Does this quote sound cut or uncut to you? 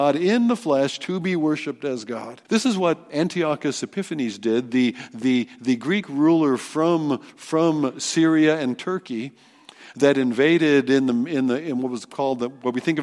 cut